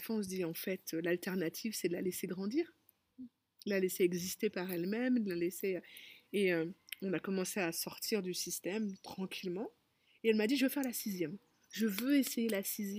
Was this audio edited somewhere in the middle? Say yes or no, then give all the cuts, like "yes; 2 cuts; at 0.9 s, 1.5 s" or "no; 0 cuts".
no; 0 cuts